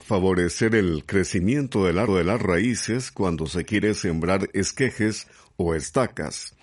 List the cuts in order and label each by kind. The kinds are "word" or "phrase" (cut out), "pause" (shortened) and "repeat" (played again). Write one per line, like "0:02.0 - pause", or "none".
0:02.1 - repeat

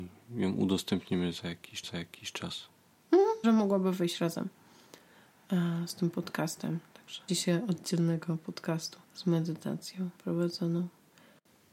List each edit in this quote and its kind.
0:01.8 - repeat
0:03.4 - word
0:07.3 - word
0:09.0 - pause
0:10.1 - pause

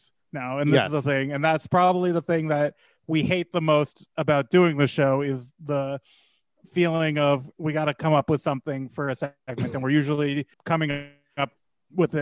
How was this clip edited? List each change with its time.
0:10.5 - pause

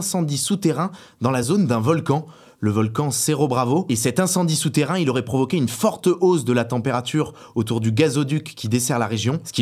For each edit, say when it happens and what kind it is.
none

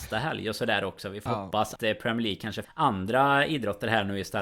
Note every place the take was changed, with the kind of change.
0:01.3 - word
0:01.8 - word
0:02.6 - word

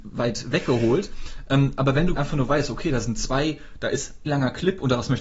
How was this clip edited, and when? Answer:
0:02.2 - word
0:04.3 - word

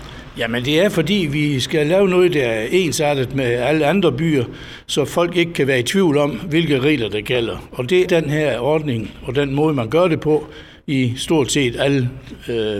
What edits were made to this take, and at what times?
0:08.0 - word

